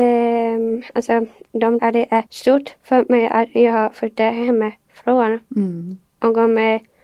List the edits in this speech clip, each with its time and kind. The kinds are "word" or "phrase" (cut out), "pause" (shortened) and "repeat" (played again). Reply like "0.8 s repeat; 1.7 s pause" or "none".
1.8 s word; 2.3 s pause